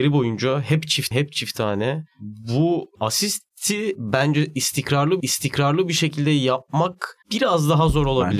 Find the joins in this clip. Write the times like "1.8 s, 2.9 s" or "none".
1.1 s, 2.9 s, 5.2 s, 7.2 s